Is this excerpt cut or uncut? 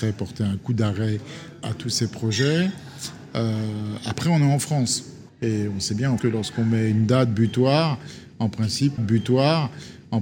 cut